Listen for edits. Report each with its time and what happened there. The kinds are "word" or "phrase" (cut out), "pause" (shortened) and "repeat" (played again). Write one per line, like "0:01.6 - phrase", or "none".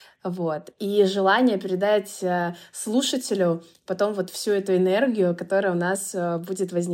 none

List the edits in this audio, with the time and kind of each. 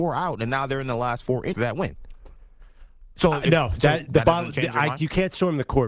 0:01.5 - word

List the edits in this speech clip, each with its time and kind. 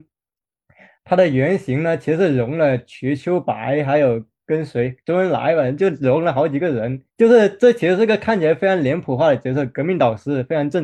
0:07.1 - pause

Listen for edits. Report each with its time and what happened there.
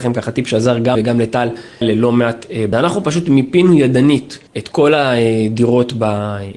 0:00.9 - word
0:01.8 - word
0:02.7 - phrase
0:04.5 - pause

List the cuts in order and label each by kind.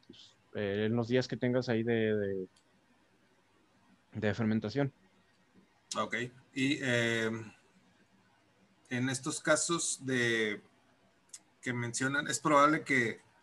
0:06.4 - pause

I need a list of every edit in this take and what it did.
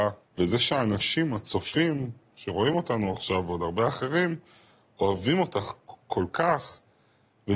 none

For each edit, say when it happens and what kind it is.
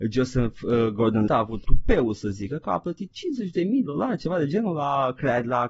0:01.3 - word
0:01.6 - word
0:03.9 - word

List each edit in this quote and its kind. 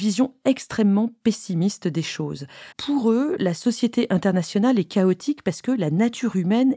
0:02.7 - pause

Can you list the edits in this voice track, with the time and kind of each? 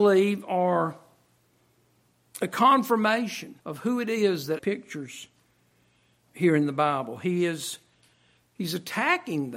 0:03.6 - pause
0:04.6 - word
0:06.3 - word

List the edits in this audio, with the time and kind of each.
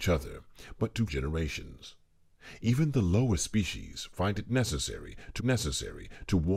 0:01.1 - word
0:05.4 - repeat

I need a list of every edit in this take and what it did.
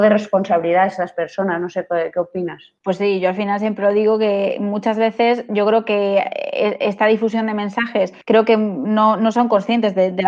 0:02.8 - pause
0:08.2 - pause

